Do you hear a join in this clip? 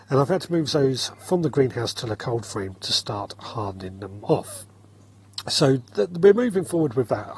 no; 0 cuts

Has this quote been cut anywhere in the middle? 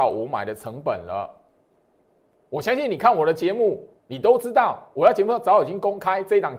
yes; 1 cut; at 4.0 s

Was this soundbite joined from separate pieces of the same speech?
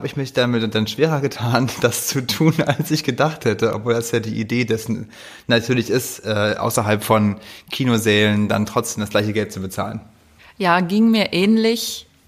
yes; 1 cut; at 10.4 s

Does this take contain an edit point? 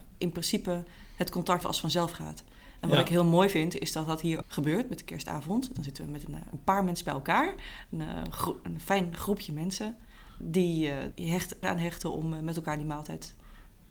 yes; 5 cuts; at 1.6 s, 4.4 s, 10.4 s, 11.1 s, 11.6 s

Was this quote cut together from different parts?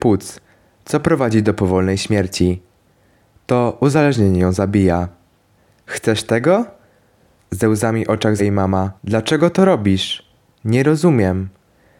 yes; 2 cuts; at 8.4 s, 9.0 s

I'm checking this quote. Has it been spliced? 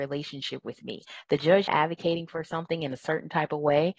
yes; 1 cut; at 1.7 s

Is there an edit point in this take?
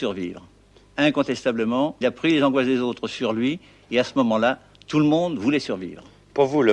yes; 1 cut; at 2.0 s

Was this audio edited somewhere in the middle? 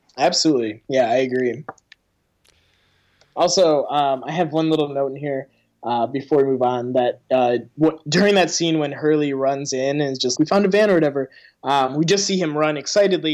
yes; 1 cut; at 10.3 s

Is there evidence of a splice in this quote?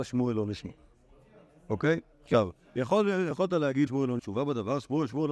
yes; 4 cuts; at 2.1 s, 3.3 s, 3.9 s, 4.2 s

